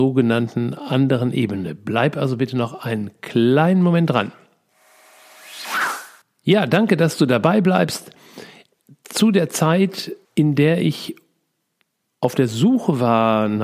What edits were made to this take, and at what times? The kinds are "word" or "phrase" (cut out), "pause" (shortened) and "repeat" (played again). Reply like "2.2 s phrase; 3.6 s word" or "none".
6.2 s pause; 10.2 s pause